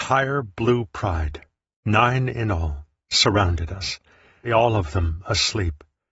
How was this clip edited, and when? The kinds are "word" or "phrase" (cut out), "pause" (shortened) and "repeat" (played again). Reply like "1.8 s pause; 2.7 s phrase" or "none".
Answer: 4.4 s word